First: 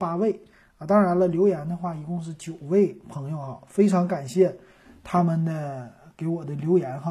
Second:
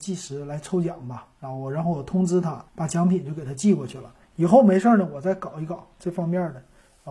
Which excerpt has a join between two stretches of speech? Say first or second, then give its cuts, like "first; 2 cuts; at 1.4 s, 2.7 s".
second; 2 cuts; at 2.7 s, 4.2 s